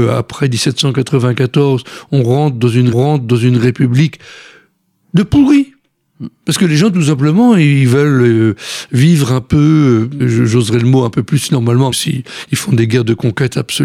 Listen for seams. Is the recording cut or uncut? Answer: cut